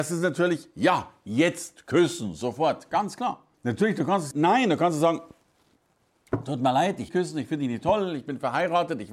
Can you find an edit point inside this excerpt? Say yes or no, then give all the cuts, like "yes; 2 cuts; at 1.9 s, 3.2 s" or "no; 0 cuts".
yes; 3 cuts; at 3.5 s, 4.3 s, 7.1 s